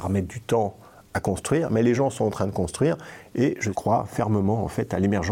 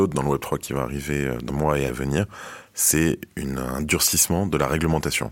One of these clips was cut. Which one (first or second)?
second